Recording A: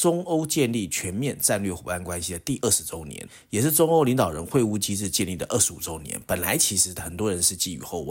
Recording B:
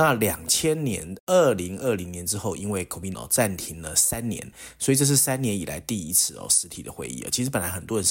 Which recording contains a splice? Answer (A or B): B